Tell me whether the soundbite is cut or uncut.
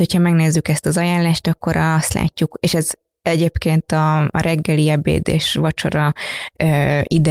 uncut